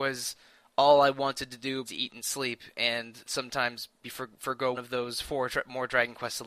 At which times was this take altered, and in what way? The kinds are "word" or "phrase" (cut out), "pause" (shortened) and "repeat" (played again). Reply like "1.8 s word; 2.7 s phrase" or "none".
1.9 s word; 3.2 s word; 4.0 s word; 4.7 s word